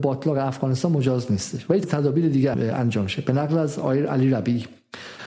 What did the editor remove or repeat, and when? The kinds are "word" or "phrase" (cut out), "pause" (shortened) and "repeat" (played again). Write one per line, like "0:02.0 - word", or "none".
0:01.8 - word
0:02.5 - word